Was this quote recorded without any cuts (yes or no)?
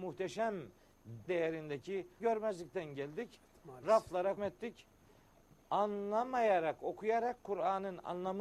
no